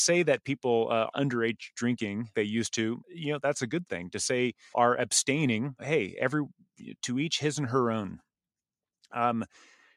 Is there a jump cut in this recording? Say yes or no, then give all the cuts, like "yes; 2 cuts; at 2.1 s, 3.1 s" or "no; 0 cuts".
yes; 6 cuts; at 1.1 s, 2.3 s, 3.0 s, 4.7 s, 5.8 s, 7.0 s